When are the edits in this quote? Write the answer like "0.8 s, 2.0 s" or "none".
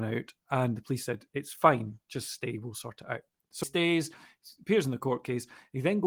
3.6 s